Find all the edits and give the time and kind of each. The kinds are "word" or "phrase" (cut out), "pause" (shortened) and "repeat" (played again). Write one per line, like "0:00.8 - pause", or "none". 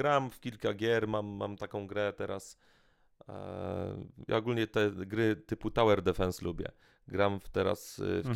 none